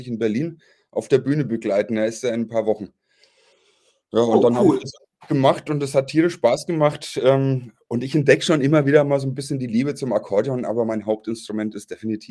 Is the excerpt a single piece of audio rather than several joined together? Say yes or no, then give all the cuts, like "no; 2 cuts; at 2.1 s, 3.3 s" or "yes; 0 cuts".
yes; 0 cuts